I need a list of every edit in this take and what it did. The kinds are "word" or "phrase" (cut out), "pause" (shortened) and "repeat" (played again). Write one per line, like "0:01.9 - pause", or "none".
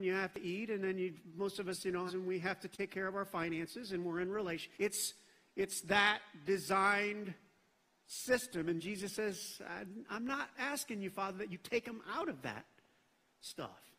0:02.1 - phrase
0:04.7 - pause